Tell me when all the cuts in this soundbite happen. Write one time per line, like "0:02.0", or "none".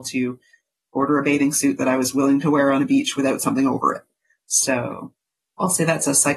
none